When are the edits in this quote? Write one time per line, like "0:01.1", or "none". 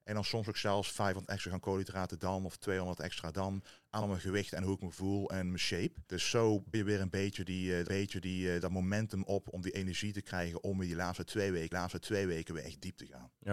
0:04.0
0:06.1
0:06.7
0:07.9
0:11.7